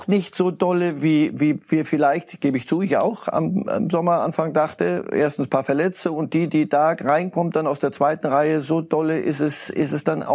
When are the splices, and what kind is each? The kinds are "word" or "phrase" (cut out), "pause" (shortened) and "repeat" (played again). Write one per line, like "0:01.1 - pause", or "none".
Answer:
none